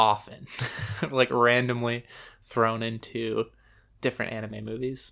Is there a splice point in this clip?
no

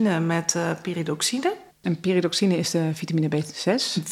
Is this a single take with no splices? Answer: no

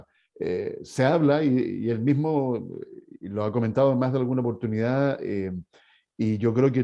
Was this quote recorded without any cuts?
yes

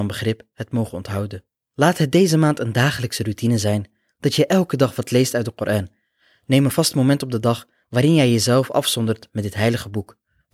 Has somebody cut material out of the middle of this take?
no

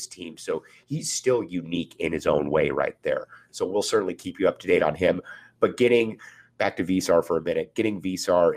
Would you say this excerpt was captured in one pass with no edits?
yes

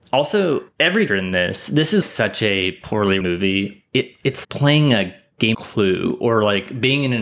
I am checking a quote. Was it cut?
yes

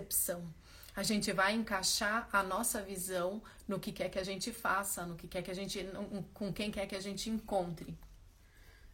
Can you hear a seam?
no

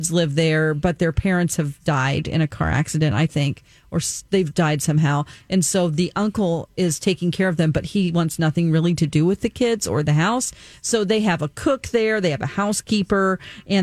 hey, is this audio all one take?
yes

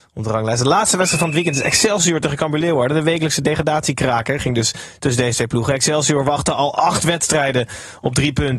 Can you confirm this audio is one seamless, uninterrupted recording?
yes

